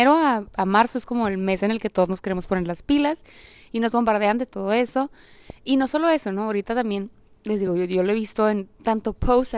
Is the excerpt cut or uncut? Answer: uncut